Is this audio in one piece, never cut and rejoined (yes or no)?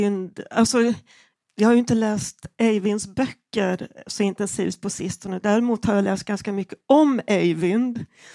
yes